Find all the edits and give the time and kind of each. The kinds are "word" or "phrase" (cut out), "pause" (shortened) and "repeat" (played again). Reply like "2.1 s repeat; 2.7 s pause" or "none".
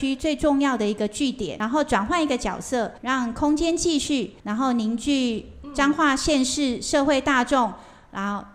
3.0 s pause; 4.4 s pause